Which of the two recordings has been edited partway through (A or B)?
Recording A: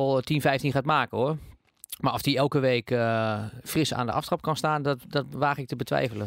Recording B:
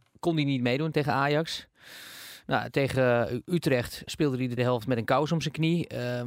B